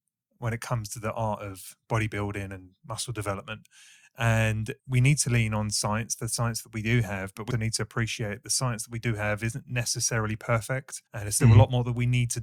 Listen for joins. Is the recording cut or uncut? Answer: cut